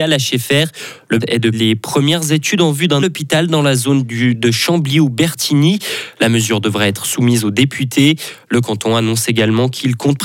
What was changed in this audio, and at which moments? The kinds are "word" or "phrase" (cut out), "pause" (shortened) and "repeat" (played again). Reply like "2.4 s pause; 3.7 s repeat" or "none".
1.2 s word; 1.5 s word; 3.0 s word